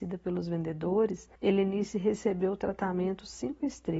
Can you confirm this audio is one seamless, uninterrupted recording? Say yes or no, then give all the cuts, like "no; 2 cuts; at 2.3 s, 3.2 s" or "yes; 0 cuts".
no; 1 cut; at 1.4 s